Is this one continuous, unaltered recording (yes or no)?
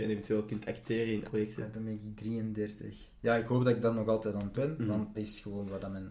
no